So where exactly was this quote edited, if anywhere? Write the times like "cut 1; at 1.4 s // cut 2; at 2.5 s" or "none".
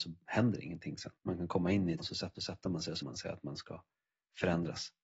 cut 1; at 1.2 s // cut 2; at 2.0 s // cut 3; at 2.3 s // cut 4; at 3.0 s